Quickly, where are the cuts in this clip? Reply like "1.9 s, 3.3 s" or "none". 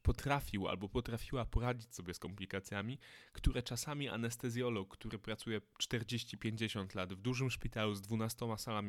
none